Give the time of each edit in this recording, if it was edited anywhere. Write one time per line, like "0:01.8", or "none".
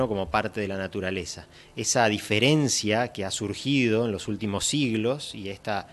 none